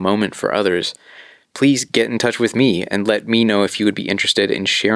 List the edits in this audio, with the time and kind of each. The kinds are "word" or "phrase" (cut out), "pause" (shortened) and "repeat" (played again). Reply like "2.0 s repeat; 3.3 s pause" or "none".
none